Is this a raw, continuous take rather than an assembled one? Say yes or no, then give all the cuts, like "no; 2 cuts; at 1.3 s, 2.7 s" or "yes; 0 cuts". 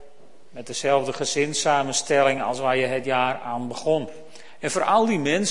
yes; 0 cuts